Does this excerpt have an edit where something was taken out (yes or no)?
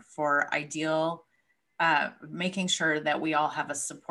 no